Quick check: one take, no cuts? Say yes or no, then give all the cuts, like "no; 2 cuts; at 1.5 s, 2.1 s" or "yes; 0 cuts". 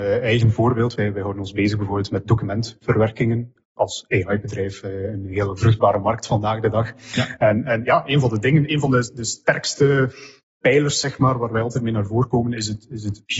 yes; 0 cuts